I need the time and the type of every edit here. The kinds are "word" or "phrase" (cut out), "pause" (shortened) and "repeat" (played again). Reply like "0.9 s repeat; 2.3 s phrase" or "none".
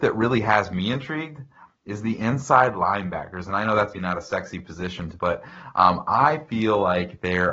3.9 s word; 5.2 s word